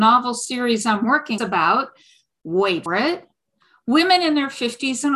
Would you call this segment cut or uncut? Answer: cut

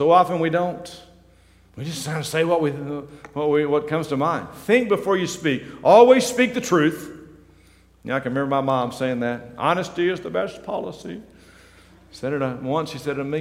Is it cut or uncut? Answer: uncut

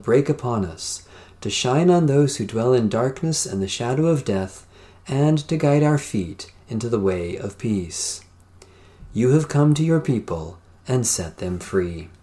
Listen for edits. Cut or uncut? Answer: uncut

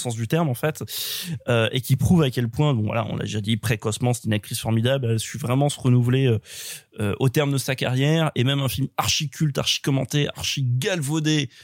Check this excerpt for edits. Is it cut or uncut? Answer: uncut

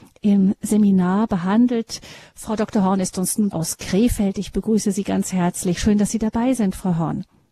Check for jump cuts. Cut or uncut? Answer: cut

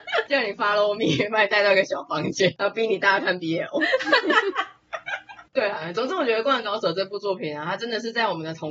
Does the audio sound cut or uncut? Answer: uncut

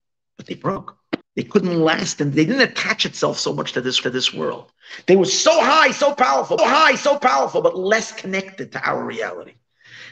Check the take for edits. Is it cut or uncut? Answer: cut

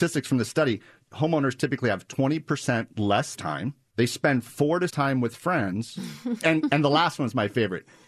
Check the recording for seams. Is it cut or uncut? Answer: cut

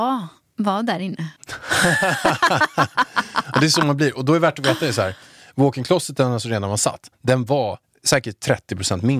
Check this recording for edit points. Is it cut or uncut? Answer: cut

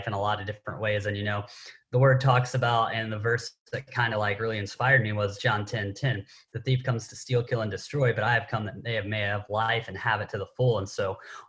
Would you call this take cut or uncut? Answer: uncut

